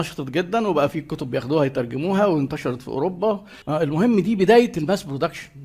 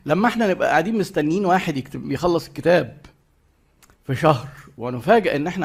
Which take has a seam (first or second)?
first